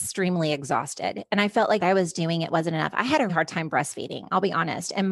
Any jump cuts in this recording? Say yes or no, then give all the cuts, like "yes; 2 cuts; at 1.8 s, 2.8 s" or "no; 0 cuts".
yes; 2 cuts; at 1.8 s, 3.3 s